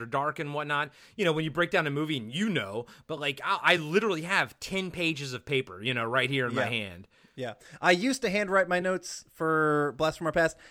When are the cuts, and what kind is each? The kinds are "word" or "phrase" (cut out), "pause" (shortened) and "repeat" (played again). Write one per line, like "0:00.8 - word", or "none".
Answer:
none

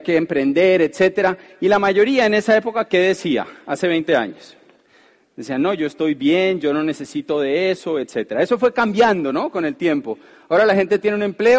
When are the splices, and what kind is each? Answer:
none

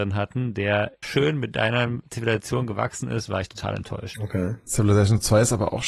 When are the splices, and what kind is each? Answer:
0:01.0 - word

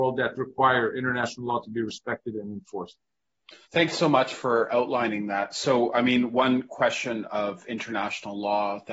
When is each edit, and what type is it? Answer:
0:03.6 - pause

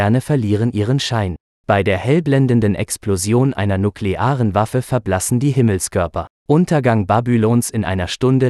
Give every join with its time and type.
0:01.5 - pause
0:06.4 - pause

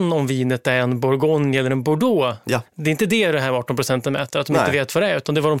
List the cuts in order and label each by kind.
0:02.7 - pause

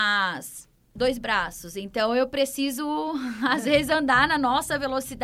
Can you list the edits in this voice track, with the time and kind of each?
none

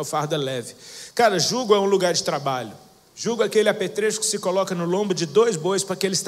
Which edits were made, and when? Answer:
none

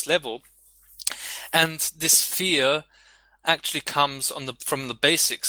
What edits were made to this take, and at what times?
none

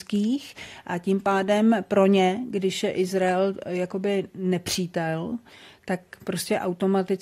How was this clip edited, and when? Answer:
none

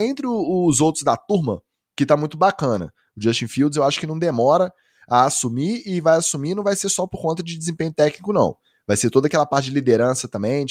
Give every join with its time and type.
none

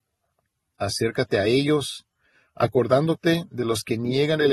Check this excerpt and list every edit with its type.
none

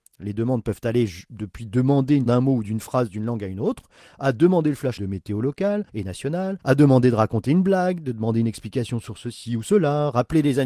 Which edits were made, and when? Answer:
0:02.3 - word
0:05.0 - phrase
0:05.9 - pause
0:06.6 - pause

